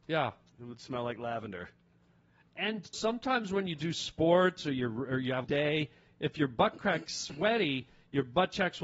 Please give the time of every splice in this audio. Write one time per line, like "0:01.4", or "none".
0:02.9
0:05.4
0:07.1